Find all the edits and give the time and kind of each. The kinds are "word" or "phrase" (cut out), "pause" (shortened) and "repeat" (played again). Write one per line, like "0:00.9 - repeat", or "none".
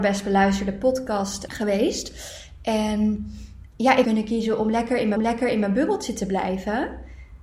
0:01.5 - word
0:03.7 - word
0:04.0 - phrase
0:05.2 - repeat